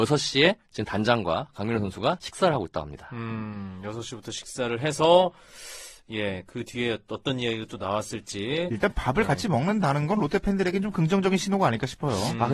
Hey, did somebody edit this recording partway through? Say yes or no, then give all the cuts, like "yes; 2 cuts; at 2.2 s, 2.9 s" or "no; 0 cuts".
no; 0 cuts